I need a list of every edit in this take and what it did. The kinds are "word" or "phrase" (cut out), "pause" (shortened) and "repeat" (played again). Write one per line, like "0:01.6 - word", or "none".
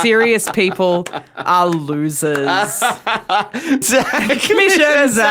0:03.8 - word